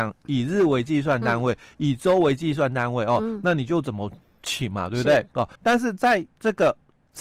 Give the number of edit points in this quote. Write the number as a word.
one